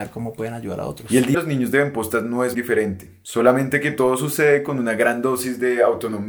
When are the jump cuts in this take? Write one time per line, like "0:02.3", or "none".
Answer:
0:01.3
0:02.5